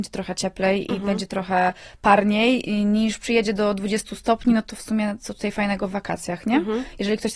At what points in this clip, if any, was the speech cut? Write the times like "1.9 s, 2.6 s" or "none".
none